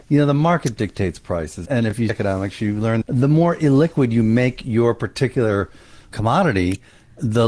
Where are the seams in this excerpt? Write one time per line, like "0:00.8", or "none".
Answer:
0:01.7
0:02.1
0:03.0
0:06.1